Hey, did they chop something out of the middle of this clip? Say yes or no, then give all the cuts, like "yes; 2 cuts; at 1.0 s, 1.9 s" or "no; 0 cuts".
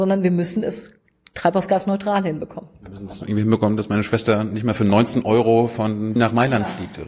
yes; 1 cut; at 6.2 s